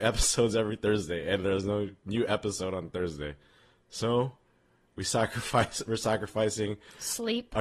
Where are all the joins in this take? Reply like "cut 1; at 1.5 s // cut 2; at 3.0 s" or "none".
none